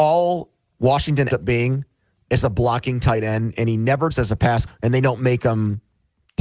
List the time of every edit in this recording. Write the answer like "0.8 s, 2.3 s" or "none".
1.3 s, 4.1 s, 4.7 s